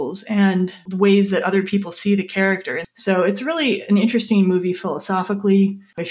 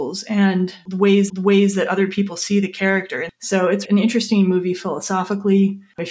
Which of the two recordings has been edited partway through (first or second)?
second